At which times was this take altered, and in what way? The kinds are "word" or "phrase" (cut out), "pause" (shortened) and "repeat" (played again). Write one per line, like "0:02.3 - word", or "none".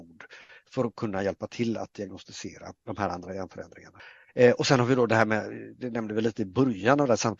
0:02.8 - pause